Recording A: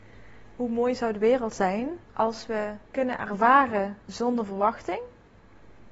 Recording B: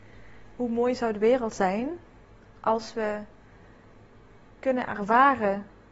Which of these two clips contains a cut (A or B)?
A